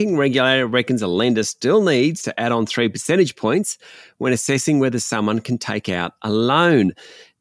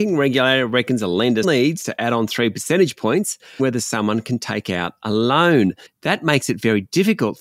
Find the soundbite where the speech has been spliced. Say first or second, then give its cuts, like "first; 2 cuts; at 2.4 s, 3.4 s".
second; 3 cuts; at 1.4 s, 3.6 s, 5.9 s